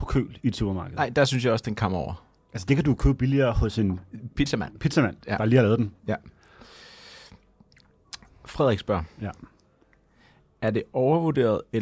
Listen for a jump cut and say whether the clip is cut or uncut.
uncut